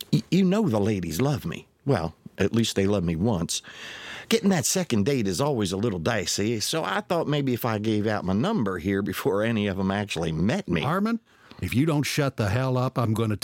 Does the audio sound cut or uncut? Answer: uncut